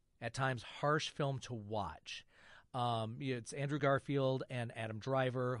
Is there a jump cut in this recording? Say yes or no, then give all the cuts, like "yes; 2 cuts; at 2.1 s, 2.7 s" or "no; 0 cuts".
no; 0 cuts